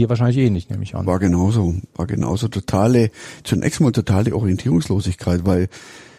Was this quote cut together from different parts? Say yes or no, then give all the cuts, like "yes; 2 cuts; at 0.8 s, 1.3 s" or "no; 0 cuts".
no; 0 cuts